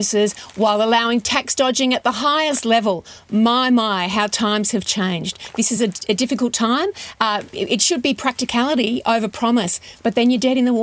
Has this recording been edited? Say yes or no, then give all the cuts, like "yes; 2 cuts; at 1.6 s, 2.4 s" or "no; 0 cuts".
no; 0 cuts